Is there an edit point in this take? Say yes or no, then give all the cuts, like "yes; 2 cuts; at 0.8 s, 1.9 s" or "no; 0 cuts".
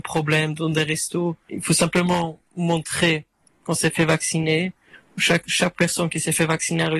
no; 0 cuts